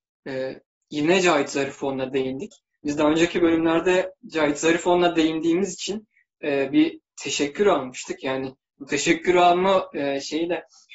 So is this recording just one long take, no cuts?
yes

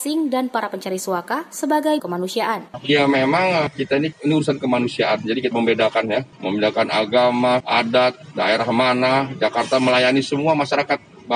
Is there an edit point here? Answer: yes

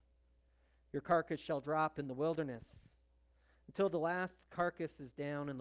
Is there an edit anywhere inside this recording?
no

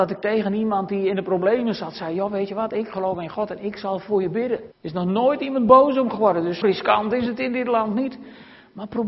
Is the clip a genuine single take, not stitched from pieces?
no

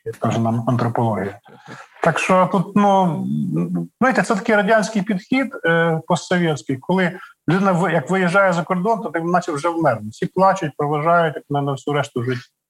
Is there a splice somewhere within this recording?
no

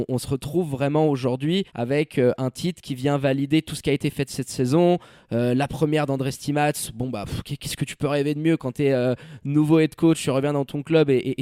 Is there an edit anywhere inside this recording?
yes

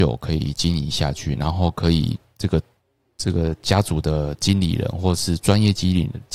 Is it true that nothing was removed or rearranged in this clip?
yes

